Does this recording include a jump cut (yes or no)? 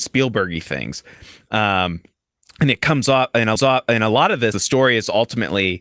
yes